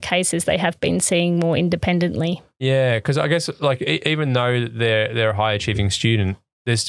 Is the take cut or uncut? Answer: uncut